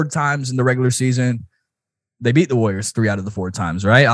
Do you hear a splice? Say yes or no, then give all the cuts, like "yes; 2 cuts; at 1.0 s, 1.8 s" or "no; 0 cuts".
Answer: no; 0 cuts